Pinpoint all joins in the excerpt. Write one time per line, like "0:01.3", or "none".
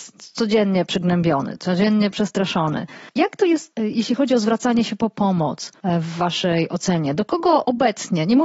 none